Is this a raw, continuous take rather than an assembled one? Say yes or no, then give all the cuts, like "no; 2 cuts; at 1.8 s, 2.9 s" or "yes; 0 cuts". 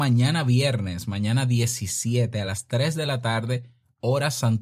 yes; 0 cuts